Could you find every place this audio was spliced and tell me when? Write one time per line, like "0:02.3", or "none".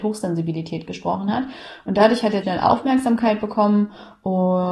0:02.4

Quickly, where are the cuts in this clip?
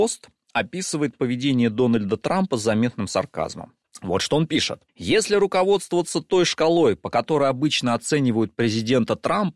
0:04.9

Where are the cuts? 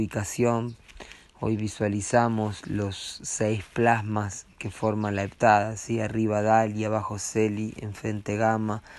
none

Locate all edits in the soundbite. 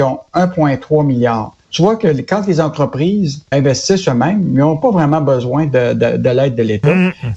0:01.6
0:03.5

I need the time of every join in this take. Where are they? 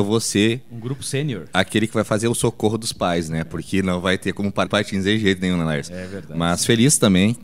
0:04.7

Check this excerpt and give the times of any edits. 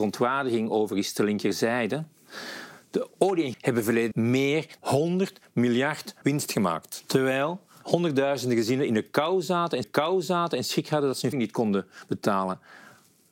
0:03.5
0:04.1
0:04.8
0:06.2
0:09.8
0:11.3

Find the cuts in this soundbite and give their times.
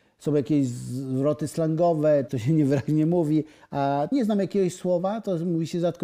0:02.3
0:04.1

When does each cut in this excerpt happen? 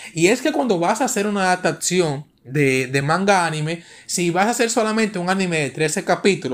none

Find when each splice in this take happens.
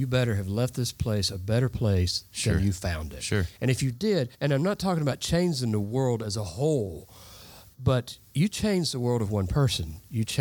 0:04.3

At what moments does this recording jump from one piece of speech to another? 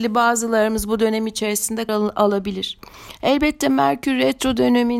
0:01.9

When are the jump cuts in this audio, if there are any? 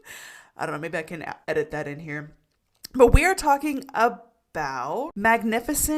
0:01.4

